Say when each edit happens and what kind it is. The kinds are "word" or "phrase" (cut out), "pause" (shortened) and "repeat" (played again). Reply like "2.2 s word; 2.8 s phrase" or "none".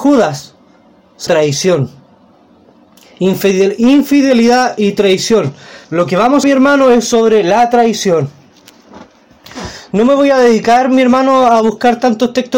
1.3 s word; 5.8 s pause; 6.4 s phrase